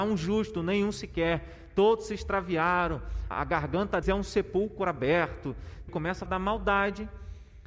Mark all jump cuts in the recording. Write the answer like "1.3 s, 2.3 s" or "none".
3.3 s, 4.0 s, 5.9 s, 6.3 s